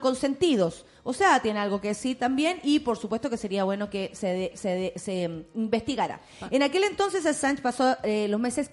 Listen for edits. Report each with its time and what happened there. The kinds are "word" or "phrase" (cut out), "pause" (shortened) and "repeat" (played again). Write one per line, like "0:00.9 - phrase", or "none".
0:04.5 - repeat